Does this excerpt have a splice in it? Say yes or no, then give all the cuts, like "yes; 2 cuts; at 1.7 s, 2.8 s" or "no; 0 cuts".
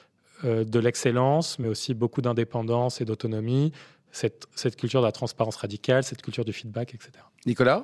no; 0 cuts